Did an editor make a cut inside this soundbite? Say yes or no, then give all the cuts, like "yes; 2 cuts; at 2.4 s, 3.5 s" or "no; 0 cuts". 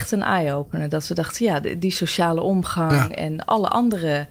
no; 0 cuts